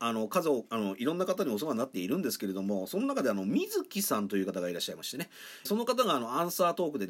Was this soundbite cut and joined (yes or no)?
yes